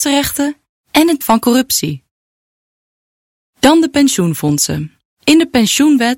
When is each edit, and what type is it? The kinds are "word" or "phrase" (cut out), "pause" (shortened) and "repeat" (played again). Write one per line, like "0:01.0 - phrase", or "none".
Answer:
0:01.2 - word
0:05.1 - pause